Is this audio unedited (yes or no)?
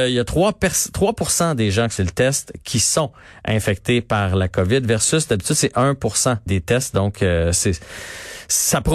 no